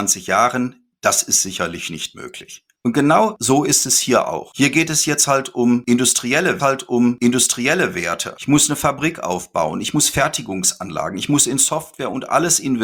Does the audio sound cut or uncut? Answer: cut